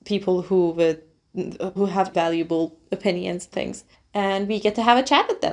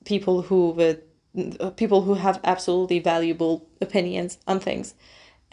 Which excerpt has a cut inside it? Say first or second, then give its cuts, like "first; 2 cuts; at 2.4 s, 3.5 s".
first; 4 cuts; at 1.8 s, 2.1 s, 3.5 s, 3.9 s